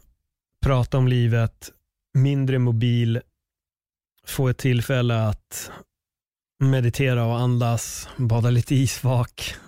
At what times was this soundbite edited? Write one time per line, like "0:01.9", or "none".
none